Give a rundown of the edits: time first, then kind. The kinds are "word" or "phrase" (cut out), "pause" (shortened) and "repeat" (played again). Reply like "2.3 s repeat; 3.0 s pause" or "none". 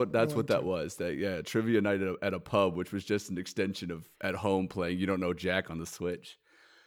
none